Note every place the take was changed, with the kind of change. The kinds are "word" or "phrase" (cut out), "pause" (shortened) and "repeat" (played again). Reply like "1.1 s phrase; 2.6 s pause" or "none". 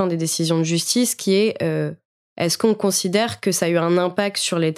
none